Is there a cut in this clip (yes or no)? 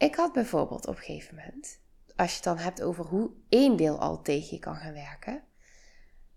yes